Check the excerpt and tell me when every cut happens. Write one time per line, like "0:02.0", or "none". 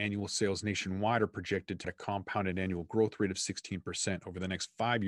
0:01.8